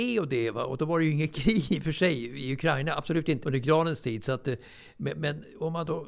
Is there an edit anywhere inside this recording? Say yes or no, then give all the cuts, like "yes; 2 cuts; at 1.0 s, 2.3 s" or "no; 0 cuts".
yes; 1 cut; at 3.4 s